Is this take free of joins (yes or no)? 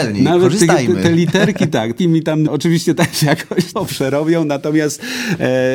no